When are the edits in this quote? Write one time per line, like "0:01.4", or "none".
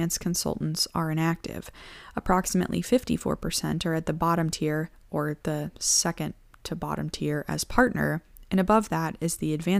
0:05.8